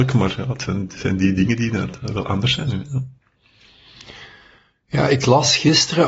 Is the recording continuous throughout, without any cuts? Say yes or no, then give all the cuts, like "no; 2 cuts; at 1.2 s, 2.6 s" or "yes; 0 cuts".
yes; 0 cuts